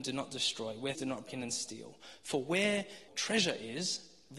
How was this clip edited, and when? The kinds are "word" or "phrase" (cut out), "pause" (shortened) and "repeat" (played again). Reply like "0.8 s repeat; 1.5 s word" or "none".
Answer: 0.9 s word; 1.3 s word; 3.1 s word